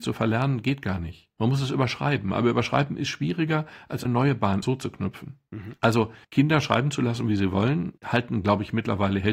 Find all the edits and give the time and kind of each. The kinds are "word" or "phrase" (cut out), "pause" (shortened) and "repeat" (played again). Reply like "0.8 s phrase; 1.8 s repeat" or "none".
4.1 s word; 4.6 s word; 6.2 s pause; 8.0 s pause

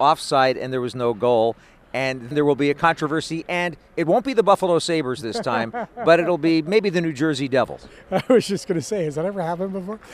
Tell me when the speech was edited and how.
2.3 s word

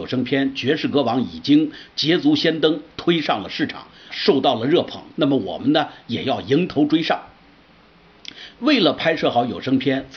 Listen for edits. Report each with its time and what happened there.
4.1 s word

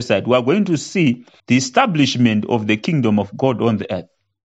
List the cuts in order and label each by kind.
1.4 s pause

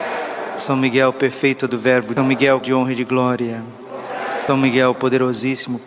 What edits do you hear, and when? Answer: 1.7 s word; 2.2 s phrase; 2.6 s word; 4.5 s word

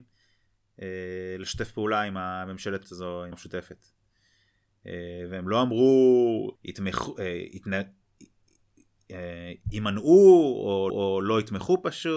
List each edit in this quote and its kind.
2.8 s word; 3.3 s word; 6.6 s pause; 9.6 s pause; 10.9 s repeat

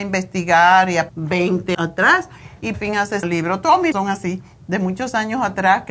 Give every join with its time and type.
1.1 s word; 1.7 s word; 2.7 s word; 3.2 s phrase; 3.9 s word

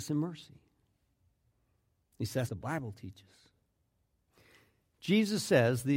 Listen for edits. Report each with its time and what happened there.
2.5 s phrase

